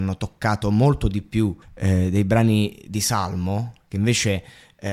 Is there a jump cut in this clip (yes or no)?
yes